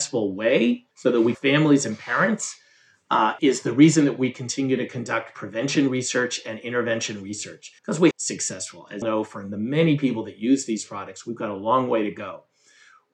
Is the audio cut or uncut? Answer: cut